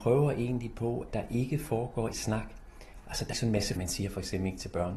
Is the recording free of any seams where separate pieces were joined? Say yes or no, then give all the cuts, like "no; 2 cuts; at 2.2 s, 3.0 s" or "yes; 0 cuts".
no; 4 cuts; at 1.1 s, 2.1 s, 3.3 s, 3.8 s